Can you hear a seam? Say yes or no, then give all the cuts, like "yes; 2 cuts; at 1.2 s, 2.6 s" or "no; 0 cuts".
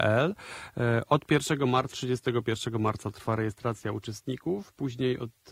yes; 1 cut; at 1.9 s